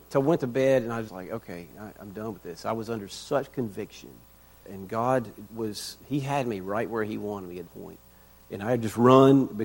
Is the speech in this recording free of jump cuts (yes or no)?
no